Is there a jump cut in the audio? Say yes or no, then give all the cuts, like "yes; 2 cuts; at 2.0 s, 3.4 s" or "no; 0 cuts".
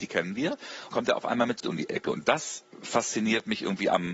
yes; 3 cuts; at 0.9 s, 1.6 s, 2.7 s